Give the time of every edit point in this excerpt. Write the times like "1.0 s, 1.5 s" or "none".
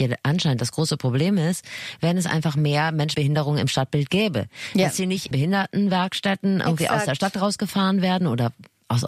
3.1 s, 5.3 s